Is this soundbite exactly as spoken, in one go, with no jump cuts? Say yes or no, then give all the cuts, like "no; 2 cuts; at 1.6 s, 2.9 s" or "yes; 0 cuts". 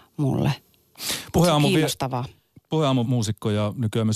no; 1 cut; at 3.1 s